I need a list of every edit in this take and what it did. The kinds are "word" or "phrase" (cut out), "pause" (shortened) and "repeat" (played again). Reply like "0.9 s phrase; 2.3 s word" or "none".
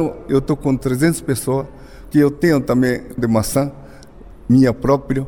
2.1 s word; 3.2 s word